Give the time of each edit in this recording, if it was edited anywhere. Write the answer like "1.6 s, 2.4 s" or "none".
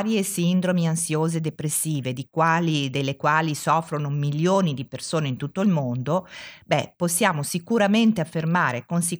none